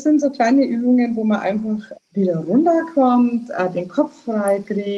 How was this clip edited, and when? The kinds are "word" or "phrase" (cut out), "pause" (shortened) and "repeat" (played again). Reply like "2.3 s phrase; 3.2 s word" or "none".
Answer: 1.9 s word